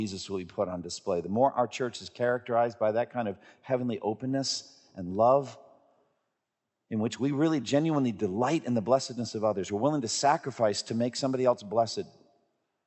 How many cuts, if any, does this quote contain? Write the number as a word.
zero